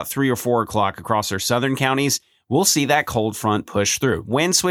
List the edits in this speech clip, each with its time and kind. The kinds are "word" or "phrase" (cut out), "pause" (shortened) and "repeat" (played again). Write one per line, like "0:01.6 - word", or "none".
none